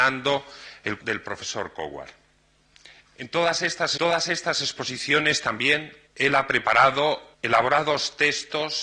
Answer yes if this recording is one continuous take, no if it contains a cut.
no